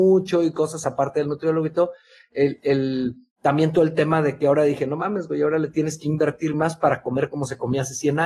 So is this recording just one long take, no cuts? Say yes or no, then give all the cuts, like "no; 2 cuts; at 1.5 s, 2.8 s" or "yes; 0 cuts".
yes; 0 cuts